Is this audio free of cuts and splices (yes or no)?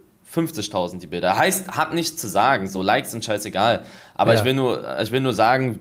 yes